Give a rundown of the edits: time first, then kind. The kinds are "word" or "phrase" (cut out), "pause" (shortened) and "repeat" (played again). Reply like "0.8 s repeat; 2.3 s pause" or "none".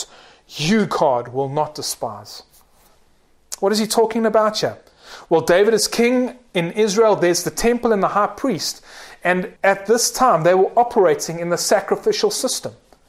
9.6 s pause